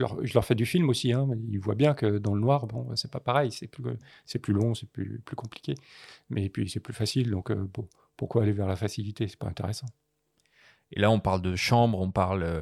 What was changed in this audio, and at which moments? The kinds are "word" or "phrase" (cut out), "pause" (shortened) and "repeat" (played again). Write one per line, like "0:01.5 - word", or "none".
none